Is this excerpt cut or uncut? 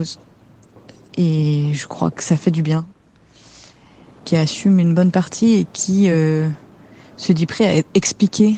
uncut